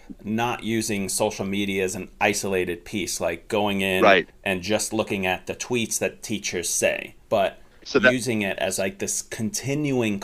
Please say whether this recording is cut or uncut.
cut